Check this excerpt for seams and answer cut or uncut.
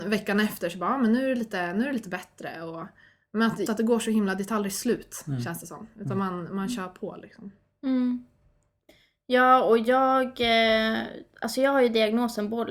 cut